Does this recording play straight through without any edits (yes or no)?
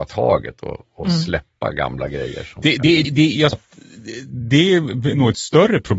no